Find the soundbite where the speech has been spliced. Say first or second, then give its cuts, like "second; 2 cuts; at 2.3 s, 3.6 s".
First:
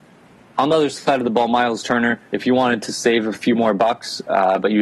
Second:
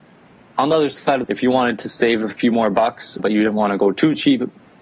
second; 2 cuts; at 1.2 s, 3.2 s